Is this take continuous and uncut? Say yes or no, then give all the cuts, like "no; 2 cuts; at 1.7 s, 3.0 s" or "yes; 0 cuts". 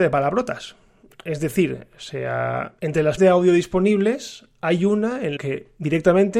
no; 3 cuts; at 2.8 s, 3.2 s, 5.4 s